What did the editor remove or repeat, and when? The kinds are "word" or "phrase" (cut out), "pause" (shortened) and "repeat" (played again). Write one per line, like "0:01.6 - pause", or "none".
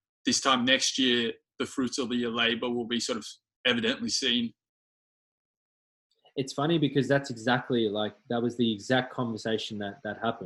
none

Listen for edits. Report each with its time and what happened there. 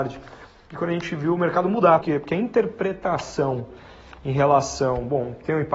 0:02.0 - word

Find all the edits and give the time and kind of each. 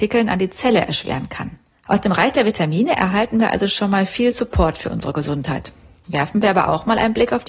none

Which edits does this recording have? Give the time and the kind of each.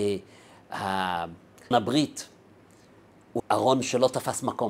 0:01.7 - word
0:03.4 - word

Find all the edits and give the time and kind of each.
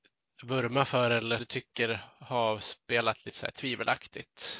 0:01.4 - word

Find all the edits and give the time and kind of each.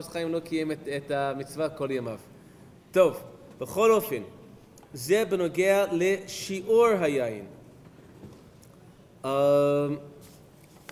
none

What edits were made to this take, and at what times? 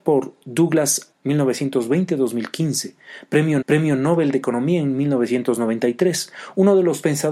0:01.1 - word
0:03.6 - repeat

